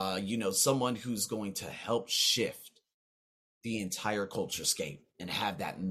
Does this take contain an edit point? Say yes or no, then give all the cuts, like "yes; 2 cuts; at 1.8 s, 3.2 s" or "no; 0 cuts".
no; 0 cuts